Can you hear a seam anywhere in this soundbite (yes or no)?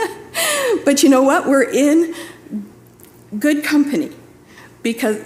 no